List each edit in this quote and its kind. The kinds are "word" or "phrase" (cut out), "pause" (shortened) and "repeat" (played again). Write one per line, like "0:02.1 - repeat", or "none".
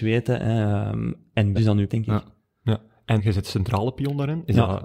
0:01.6 - word
0:01.9 - word
0:03.2 - word